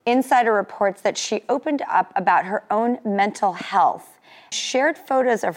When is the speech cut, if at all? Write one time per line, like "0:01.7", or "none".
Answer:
0:04.5